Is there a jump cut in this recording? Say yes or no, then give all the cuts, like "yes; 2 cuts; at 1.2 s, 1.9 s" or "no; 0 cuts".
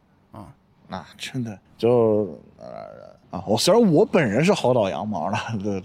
yes; 3 cuts; at 1.1 s, 1.7 s, 3.2 s